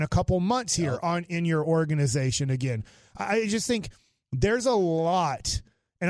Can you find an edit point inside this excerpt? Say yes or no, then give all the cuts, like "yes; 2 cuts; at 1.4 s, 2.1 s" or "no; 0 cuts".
no; 0 cuts